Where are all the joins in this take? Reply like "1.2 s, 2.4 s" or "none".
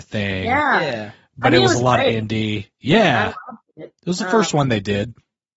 2.7 s